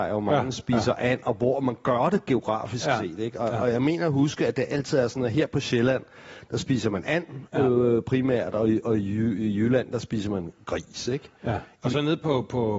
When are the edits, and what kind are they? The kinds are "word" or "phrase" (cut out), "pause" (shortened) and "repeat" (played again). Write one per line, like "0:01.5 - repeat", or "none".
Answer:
none